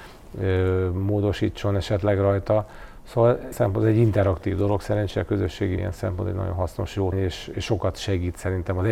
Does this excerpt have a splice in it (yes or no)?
yes